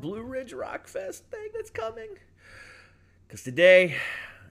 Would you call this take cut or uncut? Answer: cut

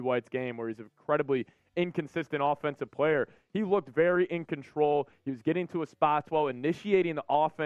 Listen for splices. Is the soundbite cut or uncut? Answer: uncut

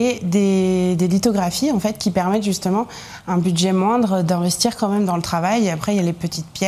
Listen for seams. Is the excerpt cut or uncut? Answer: uncut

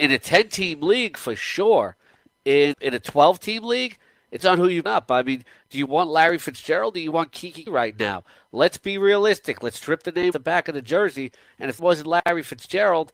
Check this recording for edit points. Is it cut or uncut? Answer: cut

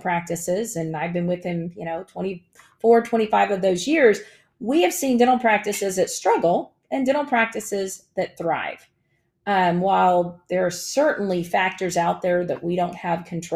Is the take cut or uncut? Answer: uncut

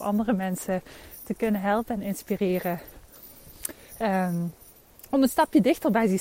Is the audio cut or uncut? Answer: uncut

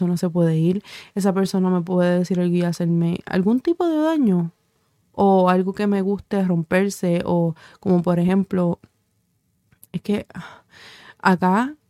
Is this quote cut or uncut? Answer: uncut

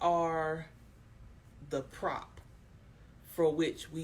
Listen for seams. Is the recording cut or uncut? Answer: uncut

